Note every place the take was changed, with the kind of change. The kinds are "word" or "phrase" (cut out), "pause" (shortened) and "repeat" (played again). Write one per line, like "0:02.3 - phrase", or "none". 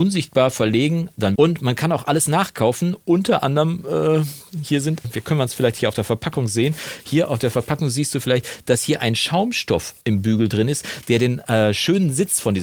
0:01.3 - phrase
0:05.0 - word
0:10.0 - pause